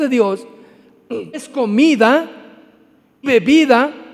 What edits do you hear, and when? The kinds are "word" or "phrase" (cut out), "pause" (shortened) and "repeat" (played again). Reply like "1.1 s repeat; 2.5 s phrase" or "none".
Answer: 1.3 s word; 3.2 s word